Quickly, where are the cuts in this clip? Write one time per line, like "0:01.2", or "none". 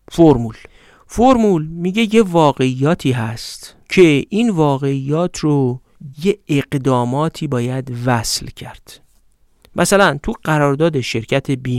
0:06.1